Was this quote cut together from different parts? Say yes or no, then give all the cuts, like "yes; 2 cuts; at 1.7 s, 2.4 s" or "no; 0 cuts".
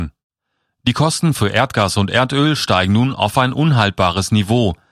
no; 0 cuts